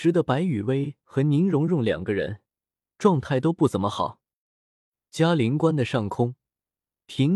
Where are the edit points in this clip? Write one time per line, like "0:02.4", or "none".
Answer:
none